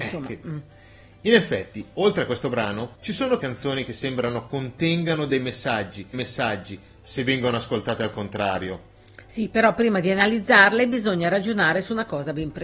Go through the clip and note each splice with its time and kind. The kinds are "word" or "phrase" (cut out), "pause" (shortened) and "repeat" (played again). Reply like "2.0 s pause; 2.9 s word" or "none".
2.9 s pause; 3.4 s phrase; 6.1 s repeat